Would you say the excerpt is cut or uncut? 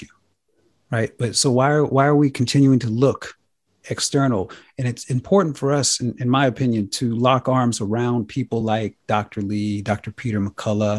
uncut